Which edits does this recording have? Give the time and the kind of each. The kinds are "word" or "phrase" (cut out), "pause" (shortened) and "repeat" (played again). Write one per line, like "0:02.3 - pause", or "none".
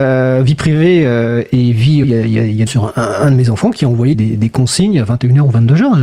0:02.0 - word
0:02.7 - phrase
0:04.1 - word